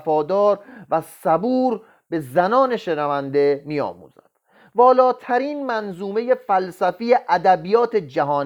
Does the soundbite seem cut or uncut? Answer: uncut